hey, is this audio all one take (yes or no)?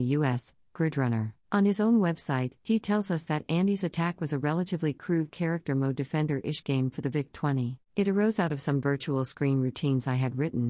no